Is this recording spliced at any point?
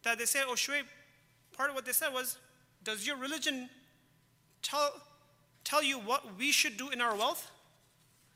no; 0 cuts

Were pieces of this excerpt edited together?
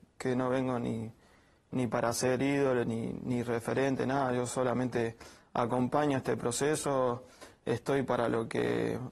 no; 0 cuts

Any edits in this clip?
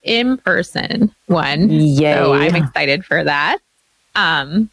no; 0 cuts

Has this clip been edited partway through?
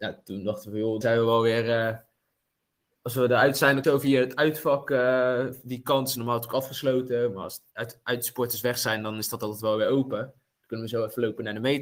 yes; 3 cuts; at 1.0 s, 3.8 s, 7.7 s

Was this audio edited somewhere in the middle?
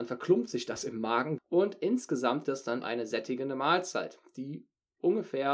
yes; 3 cuts; at 1.4 s, 2.4 s, 2.8 s

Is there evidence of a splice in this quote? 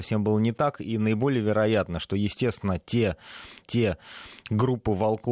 yes; 1 cut; at 3.6 s

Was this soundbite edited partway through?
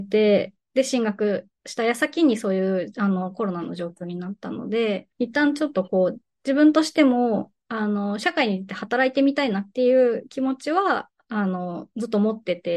yes; 2 cuts; at 1.6 s, 5.1 s

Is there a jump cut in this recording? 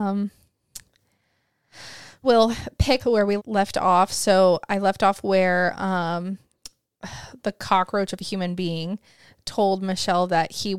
yes; 3 cuts; at 2.2 s, 3.0 s, 3.4 s

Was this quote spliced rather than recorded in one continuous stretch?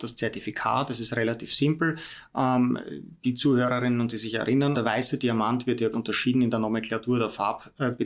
yes; 3 cuts; at 4.1 s, 4.7 s, 5.9 s

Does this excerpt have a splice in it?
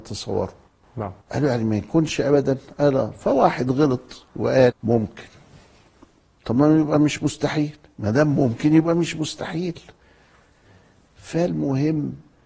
yes; 2 cuts; at 1.2 s, 4.8 s

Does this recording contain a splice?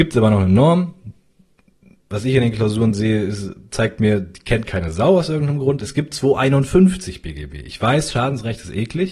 no; 0 cuts

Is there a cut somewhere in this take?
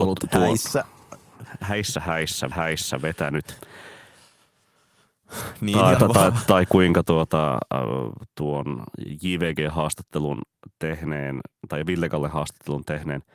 yes; 3 cuts; at 2.5 s, 6.0 s, 11.6 s

